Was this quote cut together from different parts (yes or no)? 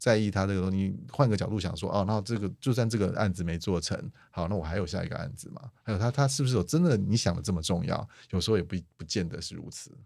no